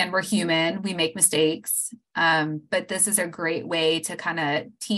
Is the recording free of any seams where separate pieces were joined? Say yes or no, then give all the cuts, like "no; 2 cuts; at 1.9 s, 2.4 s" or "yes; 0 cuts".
yes; 0 cuts